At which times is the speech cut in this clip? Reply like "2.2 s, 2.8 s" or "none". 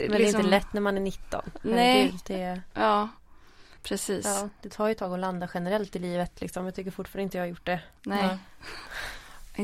3.8 s